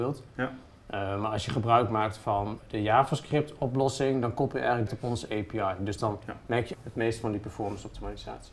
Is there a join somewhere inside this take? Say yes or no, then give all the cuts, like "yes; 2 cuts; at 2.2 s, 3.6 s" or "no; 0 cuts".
yes; 3 cuts; at 2.6 s, 4.9 s, 6.7 s